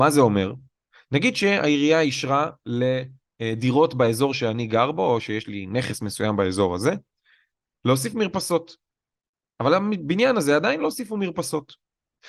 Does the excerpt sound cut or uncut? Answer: uncut